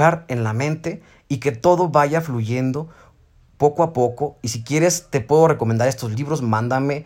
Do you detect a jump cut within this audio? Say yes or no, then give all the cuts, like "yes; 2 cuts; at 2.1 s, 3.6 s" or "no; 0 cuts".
no; 0 cuts